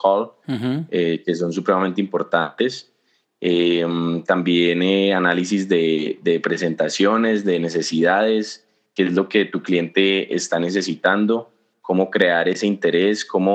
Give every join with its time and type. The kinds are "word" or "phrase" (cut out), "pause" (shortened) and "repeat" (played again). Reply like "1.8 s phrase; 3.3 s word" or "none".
none

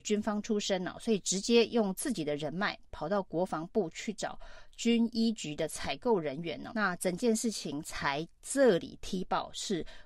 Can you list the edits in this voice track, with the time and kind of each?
6.7 s word

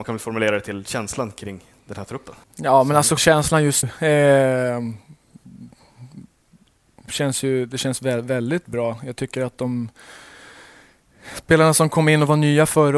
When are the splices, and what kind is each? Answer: 2.4 s pause; 3.2 s word; 3.8 s word

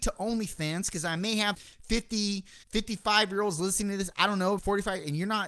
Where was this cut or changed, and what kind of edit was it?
1.5 s word; 2.6 s pause; 4.6 s word

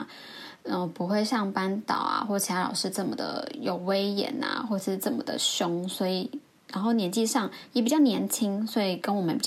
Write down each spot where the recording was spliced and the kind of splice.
6.5 s pause

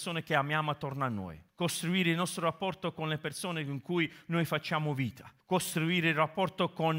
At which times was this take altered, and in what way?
1.5 s pause; 5.4 s pause

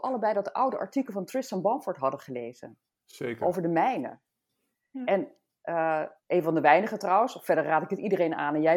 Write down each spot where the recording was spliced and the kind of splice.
2.9 s pause; 6.2 s pause

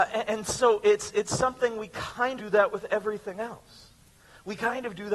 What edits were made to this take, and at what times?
2.4 s word

